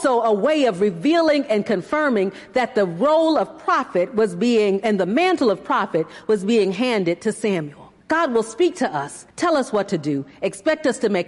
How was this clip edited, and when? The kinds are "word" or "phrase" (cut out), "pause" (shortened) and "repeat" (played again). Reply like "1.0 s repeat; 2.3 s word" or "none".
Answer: 8.0 s pause; 9.3 s pause

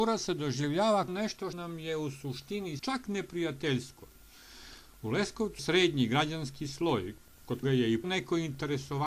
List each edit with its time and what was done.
1.1 s word; 1.5 s word; 2.8 s word; 5.6 s word; 7.6 s word; 8.0 s word

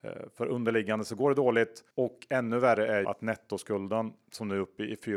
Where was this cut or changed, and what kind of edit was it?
1.9 s pause; 3.0 s word

